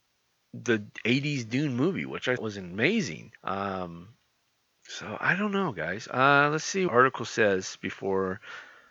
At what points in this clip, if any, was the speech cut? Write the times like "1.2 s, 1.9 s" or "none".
2.4 s, 3.4 s, 6.9 s